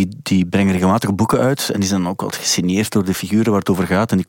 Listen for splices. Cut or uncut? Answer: uncut